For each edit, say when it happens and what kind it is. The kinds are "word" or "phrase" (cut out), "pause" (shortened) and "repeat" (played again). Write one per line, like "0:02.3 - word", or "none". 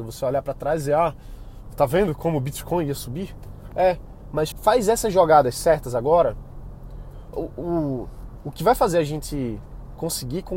0:04.5 - word
0:07.3 - word